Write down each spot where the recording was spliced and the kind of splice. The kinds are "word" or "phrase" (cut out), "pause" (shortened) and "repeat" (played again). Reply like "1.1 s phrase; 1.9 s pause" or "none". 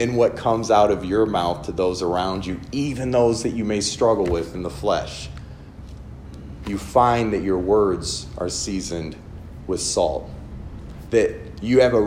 none